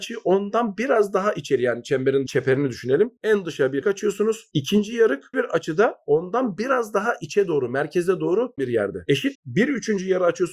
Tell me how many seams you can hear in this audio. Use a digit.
5